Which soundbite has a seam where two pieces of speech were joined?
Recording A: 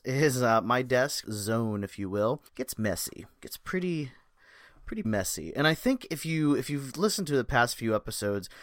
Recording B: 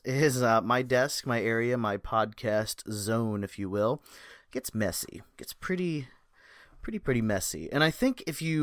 A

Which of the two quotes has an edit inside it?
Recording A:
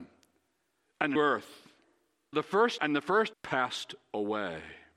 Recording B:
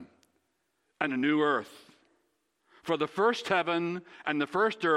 A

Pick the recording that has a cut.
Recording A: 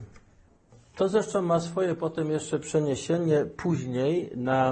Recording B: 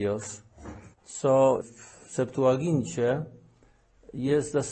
B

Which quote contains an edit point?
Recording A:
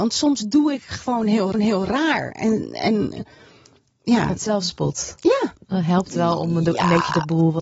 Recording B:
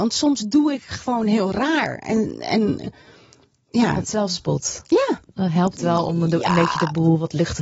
A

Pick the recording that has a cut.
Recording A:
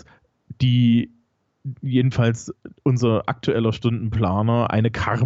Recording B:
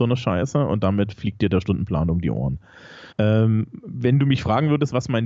B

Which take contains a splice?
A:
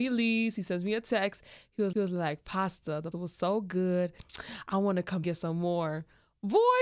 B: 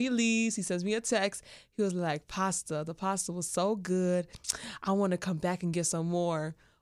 A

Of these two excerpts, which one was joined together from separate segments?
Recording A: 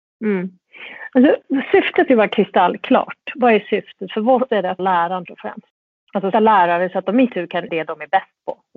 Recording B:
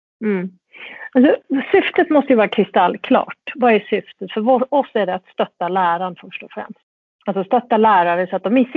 A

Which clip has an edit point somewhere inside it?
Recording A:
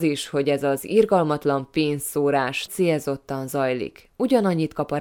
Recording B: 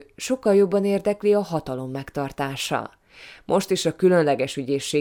A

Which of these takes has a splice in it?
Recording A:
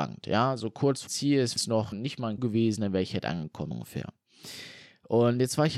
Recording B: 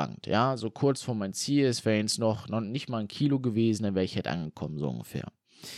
A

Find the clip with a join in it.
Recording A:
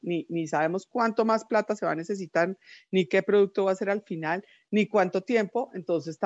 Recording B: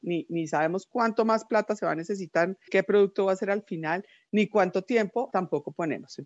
B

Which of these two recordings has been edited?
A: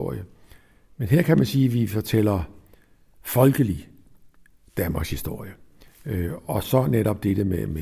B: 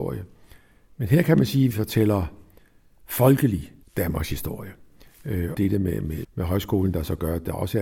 B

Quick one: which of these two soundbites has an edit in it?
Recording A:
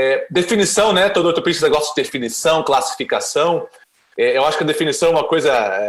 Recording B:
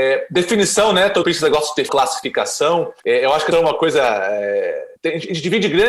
B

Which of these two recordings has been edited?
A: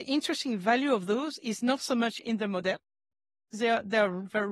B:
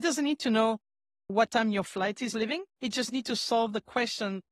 B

